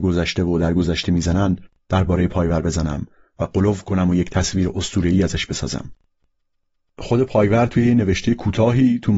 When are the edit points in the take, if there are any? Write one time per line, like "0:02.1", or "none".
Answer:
none